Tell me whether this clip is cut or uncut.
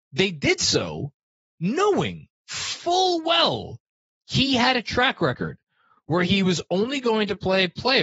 uncut